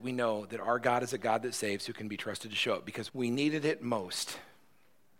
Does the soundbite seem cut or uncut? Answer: cut